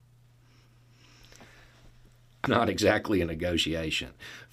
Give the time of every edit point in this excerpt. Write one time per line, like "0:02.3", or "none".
0:02.5